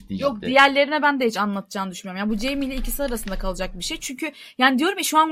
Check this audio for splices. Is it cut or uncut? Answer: uncut